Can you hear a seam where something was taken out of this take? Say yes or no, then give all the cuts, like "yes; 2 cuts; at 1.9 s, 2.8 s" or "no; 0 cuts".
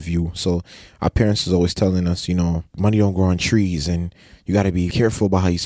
no; 0 cuts